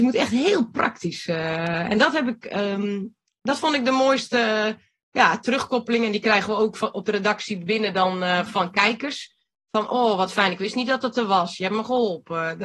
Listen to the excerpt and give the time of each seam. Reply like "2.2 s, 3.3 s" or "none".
none